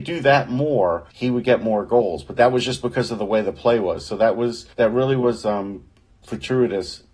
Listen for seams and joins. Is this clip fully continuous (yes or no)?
no